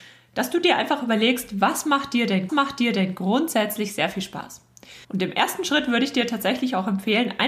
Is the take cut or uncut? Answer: cut